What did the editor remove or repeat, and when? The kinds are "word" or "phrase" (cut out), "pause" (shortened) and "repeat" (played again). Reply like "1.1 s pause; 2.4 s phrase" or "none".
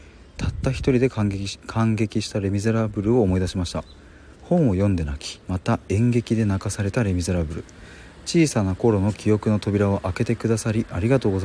4.3 s pause; 5.4 s pause